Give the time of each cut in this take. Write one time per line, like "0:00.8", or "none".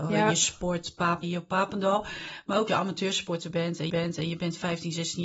0:01.2
0:02.7
0:03.9